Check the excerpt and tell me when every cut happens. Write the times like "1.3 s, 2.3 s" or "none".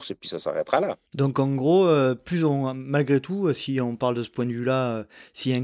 1.1 s